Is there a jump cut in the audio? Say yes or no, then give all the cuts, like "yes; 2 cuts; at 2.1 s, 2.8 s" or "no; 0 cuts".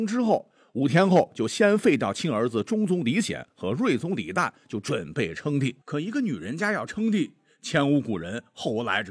yes; 1 cut; at 5.8 s